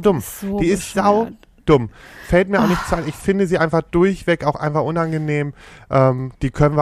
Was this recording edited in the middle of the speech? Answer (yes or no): no